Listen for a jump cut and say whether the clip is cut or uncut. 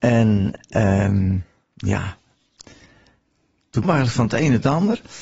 cut